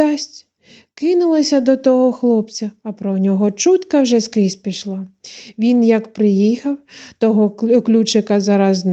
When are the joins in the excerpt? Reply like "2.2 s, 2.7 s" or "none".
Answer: none